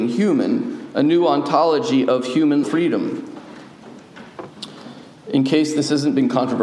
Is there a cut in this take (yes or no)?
yes